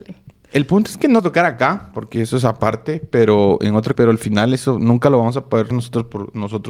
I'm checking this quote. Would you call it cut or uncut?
cut